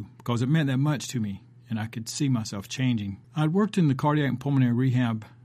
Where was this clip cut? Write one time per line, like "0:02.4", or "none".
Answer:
0:03.2